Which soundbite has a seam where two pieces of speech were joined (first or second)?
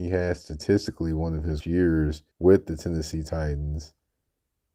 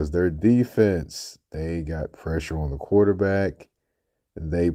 first